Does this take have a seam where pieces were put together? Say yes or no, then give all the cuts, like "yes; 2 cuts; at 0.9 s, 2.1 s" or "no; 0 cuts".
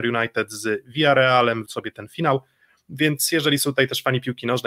yes; 1 cut; at 1.7 s